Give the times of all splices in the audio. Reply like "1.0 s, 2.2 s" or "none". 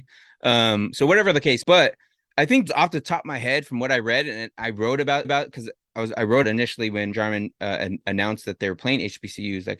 1.6 s, 2.3 s, 2.7 s, 5.2 s, 6.4 s, 7.1 s